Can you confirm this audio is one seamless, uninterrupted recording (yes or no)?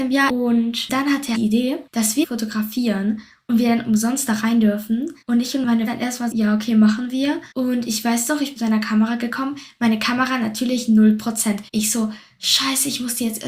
no